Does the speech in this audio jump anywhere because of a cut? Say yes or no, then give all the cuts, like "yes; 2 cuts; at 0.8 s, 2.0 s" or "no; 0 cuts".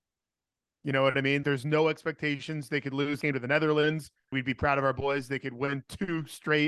yes; 3 cuts; at 1.4 s, 3.2 s, 4.3 s